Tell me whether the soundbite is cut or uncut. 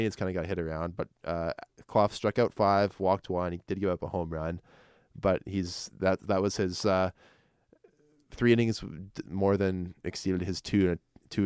uncut